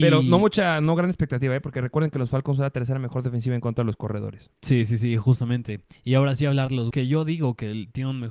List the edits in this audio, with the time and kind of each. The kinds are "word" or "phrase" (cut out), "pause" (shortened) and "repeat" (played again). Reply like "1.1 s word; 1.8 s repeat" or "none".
6.9 s word